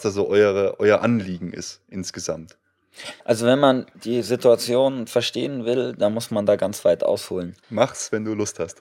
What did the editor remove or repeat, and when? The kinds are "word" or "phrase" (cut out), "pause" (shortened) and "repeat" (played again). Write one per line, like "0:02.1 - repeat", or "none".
0:03.2 - pause
0:03.9 - pause
0:07.6 - pause